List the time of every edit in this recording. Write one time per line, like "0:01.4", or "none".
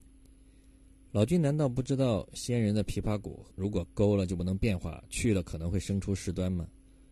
0:03.5